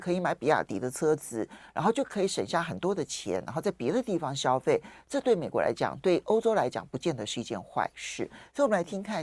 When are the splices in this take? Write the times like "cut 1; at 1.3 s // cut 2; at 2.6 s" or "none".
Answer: none